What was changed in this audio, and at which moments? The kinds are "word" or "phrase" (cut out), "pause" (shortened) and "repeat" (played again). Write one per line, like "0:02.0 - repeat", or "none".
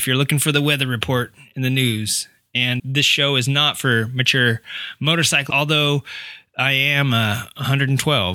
0:02.8 - word
0:05.5 - word